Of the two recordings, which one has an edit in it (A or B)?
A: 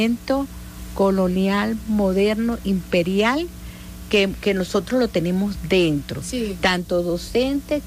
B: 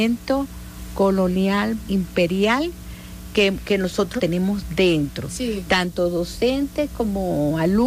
B